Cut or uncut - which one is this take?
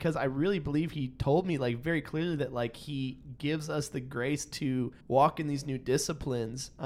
cut